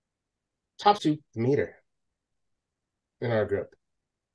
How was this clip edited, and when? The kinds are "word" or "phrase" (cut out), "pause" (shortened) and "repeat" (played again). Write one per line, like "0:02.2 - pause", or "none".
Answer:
0:01.0 - phrase

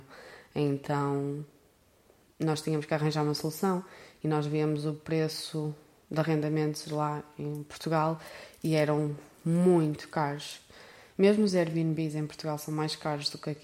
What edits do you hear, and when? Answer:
none

